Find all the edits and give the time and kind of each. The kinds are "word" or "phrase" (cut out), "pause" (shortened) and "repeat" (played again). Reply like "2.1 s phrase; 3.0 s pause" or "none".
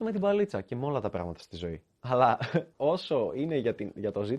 2.7 s pause

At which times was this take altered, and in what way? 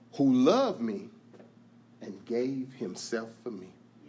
none

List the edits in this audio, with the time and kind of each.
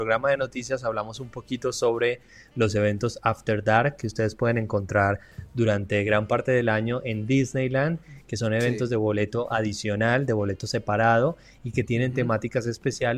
none

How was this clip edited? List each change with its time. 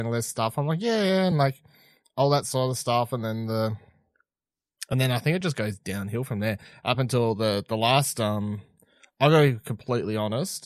none

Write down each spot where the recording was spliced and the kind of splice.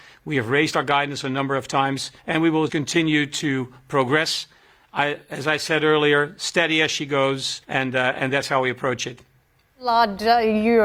2.2 s pause; 2.7 s word; 7.6 s pause

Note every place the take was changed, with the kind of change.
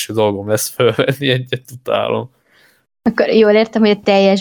1.6 s phrase

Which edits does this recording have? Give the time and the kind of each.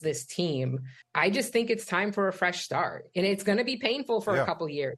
1.0 s pause

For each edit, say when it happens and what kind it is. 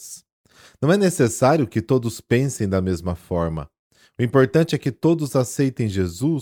none

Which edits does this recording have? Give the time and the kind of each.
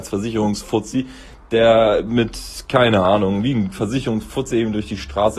none

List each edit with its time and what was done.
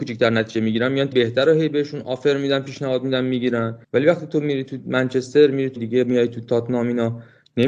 1.1 s word; 3.8 s pause; 5.8 s word

